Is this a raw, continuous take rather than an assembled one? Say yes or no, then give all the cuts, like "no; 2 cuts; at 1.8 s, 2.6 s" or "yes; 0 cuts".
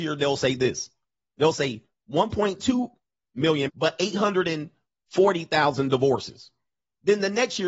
no; 1 cut; at 3.7 s